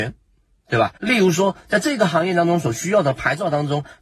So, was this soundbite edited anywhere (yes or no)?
yes